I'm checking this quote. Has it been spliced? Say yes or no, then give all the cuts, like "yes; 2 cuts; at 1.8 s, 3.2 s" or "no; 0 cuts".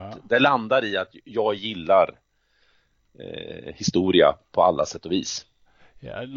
no; 0 cuts